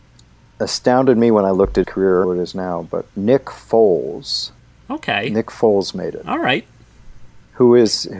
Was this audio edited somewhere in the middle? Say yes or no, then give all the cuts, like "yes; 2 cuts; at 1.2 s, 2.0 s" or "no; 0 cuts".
yes; 4 cuts; at 1.8 s, 2.2 s, 3.1 s, 4.6 s